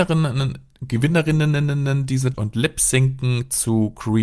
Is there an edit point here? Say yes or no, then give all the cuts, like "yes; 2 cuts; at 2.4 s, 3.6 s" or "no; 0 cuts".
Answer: yes; 1 cut; at 2.3 s